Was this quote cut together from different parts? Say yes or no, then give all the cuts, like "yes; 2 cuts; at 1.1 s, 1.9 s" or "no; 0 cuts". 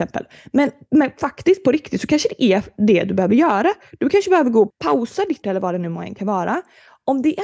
yes; 2 cuts; at 4.7 s, 5.4 s